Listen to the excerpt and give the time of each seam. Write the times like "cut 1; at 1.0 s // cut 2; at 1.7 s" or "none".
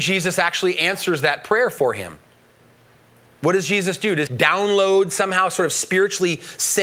cut 1; at 4.3 s